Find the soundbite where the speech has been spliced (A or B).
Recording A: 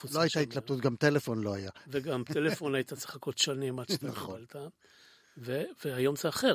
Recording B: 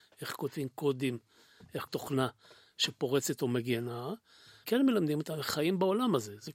B